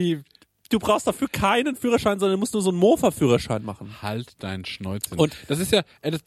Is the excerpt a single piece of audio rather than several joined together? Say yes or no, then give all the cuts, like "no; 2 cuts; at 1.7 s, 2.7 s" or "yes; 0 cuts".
yes; 0 cuts